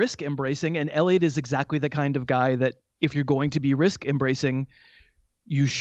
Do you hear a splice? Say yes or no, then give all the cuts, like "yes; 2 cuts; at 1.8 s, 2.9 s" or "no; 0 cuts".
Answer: no; 0 cuts